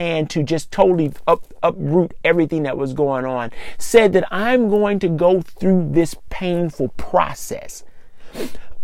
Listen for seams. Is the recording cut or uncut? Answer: uncut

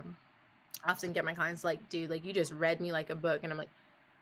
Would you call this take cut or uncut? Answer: uncut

